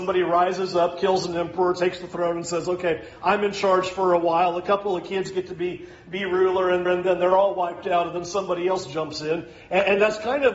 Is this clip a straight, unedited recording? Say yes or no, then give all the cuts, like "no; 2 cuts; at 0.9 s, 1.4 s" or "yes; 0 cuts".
no; 1 cut; at 6.9 s